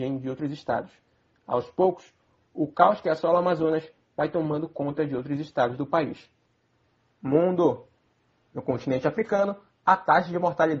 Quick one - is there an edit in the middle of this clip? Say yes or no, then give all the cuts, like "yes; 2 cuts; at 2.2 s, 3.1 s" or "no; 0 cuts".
no; 0 cuts